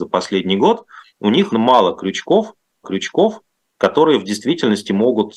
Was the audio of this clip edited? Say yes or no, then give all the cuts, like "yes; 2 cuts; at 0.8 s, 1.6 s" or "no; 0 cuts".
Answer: yes; 3 cuts; at 1.1 s, 1.5 s, 2.8 s